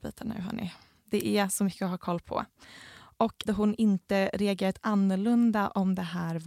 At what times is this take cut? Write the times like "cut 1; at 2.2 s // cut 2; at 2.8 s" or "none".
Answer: cut 1; at 3.5 s